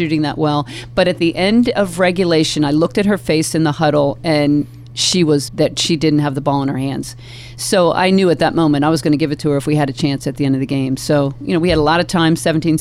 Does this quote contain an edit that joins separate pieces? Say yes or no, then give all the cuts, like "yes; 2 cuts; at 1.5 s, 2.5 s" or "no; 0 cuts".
yes; 1 cut; at 5.5 s